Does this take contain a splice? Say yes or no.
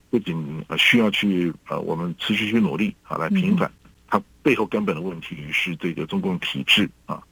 yes